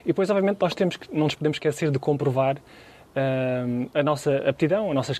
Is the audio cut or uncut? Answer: uncut